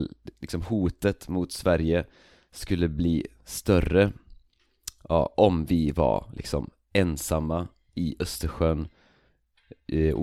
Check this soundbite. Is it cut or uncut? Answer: uncut